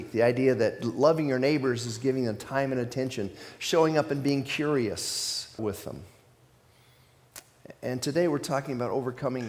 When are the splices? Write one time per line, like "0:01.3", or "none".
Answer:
0:05.6